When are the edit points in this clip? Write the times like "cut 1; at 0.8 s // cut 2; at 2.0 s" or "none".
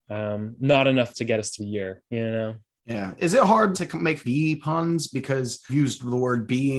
cut 1; at 1.1 s // cut 2; at 1.6 s // cut 3; at 3.7 s // cut 4; at 4.2 s // cut 5; at 5.7 s